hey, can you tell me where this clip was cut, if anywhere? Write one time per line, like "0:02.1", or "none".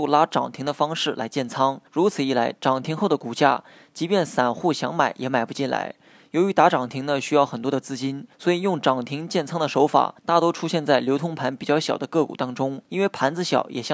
0:01.9
0:08.3
0:10.2
0:12.8